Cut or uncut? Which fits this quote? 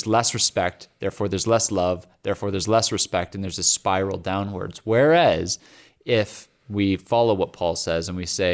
uncut